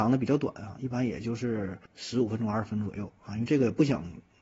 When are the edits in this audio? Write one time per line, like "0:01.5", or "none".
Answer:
0:01.9

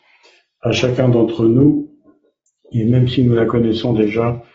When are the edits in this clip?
none

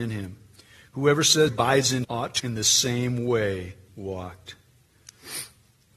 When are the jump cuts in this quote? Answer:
0:01.5
0:02.0
0:02.4
0:03.9

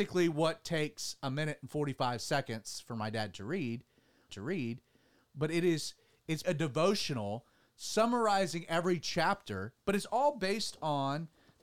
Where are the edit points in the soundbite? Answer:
0:04.3
0:06.4

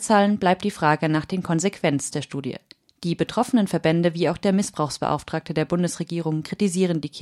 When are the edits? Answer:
0:02.1
0:02.9

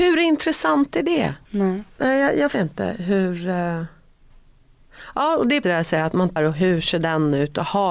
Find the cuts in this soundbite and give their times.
0:01.5
0:02.5
0:05.6
0:06.4

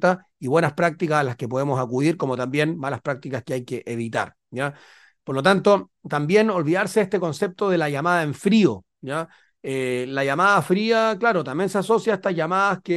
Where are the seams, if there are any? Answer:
none

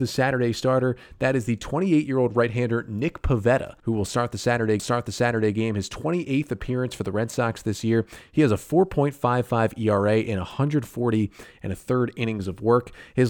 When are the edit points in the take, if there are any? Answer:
0:03.8
0:04.8

